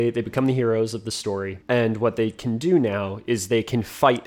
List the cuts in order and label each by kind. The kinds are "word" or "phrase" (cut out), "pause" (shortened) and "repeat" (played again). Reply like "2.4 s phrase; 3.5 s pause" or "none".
1.6 s pause

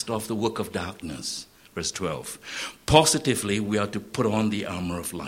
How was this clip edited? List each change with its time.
none

